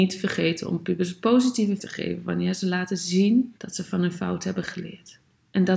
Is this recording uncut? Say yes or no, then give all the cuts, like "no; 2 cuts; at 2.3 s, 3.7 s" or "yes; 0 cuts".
no; 2 cuts; at 1.8 s, 3.6 s